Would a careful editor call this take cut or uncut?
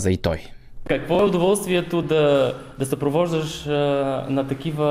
uncut